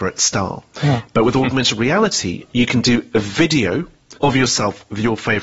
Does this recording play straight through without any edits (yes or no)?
no